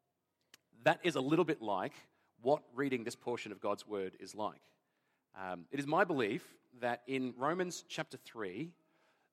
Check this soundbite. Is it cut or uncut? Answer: uncut